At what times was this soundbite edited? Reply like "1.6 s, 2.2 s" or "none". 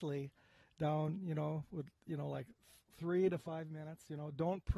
none